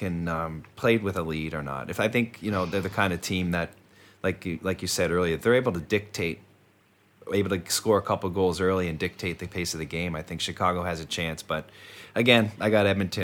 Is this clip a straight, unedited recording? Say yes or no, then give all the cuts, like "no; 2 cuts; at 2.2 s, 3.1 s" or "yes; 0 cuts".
yes; 0 cuts